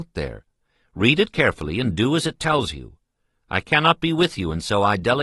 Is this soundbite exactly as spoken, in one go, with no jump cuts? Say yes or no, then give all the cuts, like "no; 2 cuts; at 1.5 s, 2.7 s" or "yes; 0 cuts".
yes; 0 cuts